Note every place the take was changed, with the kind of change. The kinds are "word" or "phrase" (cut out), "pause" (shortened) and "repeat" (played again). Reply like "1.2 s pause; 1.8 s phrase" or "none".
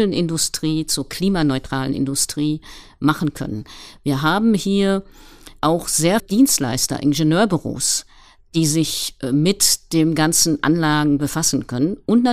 5.6 s word; 6.2 s word